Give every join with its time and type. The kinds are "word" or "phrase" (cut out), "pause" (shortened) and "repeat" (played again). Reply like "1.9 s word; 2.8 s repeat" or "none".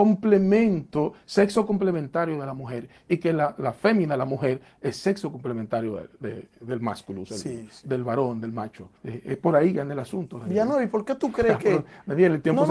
9.0 s pause